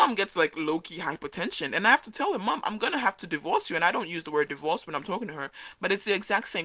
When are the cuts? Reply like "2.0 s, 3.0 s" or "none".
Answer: none